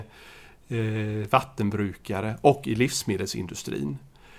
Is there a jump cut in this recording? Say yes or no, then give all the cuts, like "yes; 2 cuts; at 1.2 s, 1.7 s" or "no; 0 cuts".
no; 0 cuts